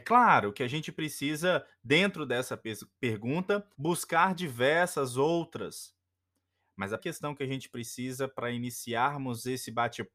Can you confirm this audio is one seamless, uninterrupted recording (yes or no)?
no